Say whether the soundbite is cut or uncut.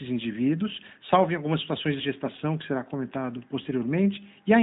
cut